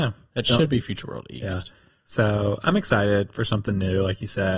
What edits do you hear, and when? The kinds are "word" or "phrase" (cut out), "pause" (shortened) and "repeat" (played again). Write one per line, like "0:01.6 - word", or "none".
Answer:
none